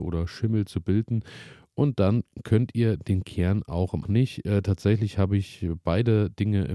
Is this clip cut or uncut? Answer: cut